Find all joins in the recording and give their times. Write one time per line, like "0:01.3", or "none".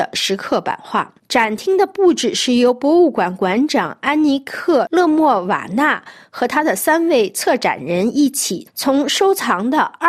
0:01.2

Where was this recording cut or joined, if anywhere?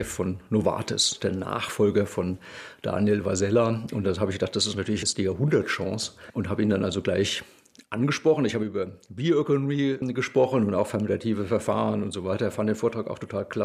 none

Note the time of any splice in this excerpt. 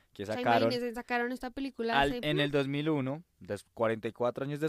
none

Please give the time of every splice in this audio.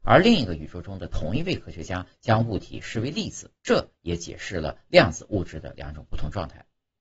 0:03.6

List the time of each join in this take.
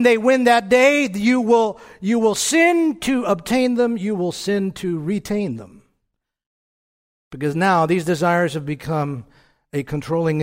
none

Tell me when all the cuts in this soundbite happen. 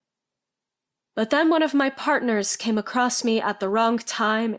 none

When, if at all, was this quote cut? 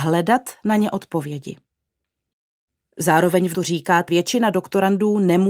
0:03.5
0:04.1

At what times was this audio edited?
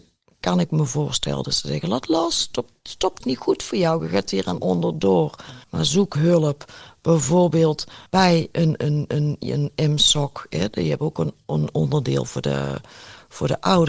0:03.2
0:05.6
0:08.1
0:09.1

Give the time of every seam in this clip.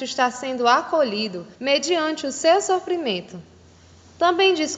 0:01.5

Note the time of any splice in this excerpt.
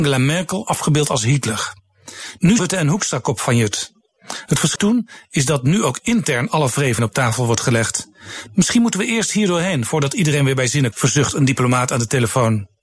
0:02.6
0:04.8
0:07.0
0:10.9

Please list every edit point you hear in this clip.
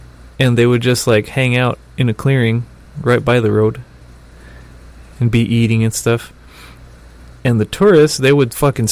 none

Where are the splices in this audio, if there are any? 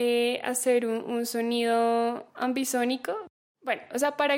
0:02.3

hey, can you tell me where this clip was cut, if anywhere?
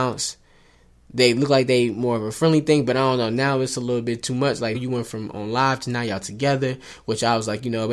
0:04.7

